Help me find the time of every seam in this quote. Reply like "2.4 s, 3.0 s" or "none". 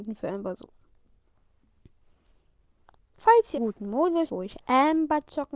3.6 s, 4.3 s